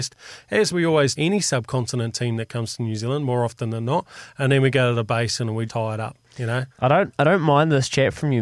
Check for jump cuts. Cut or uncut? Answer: cut